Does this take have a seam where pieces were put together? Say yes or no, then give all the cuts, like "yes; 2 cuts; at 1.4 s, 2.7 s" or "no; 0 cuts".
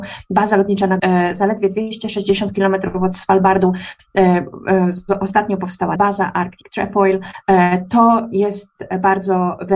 yes; 2 cuts; at 1.0 s, 6.0 s